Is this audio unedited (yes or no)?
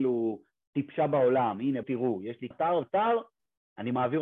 no